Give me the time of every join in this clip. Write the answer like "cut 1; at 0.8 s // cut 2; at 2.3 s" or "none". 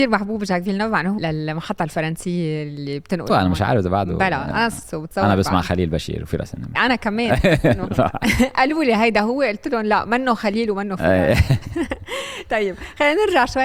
cut 1; at 1.2 s // cut 2; at 3.3 s // cut 3; at 4.8 s